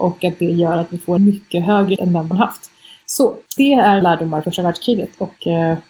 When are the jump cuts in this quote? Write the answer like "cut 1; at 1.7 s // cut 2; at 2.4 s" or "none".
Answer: cut 1; at 1.2 s // cut 2; at 2.0 s // cut 3; at 2.3 s // cut 4; at 3.6 s // cut 5; at 4.0 s // cut 6; at 4.4 s